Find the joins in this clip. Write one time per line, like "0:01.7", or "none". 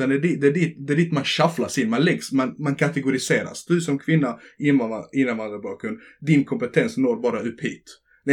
none